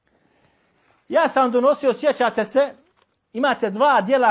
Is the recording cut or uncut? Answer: uncut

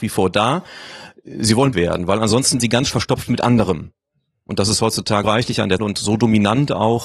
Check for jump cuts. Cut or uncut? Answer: cut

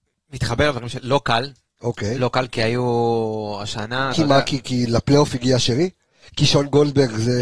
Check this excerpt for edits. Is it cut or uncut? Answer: uncut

